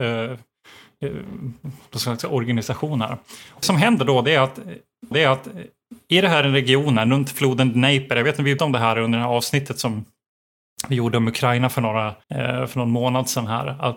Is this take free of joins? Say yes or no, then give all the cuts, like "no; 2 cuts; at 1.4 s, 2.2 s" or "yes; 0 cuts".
no; 4 cuts; at 3.6 s, 5.1 s, 8.6 s, 12.2 s